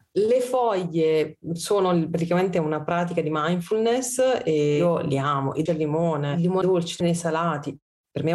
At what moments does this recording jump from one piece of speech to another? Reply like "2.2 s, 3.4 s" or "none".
5.7 s, 6.6 s, 7.0 s